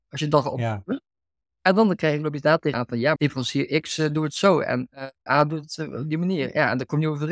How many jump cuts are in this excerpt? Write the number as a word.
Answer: three